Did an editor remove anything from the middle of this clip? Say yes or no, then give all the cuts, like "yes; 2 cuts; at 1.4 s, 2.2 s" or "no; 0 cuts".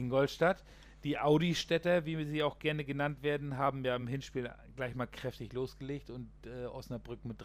no; 0 cuts